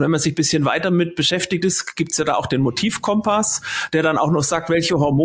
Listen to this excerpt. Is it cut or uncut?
cut